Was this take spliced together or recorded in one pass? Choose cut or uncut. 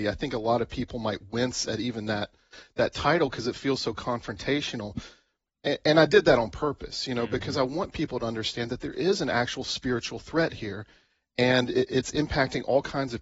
uncut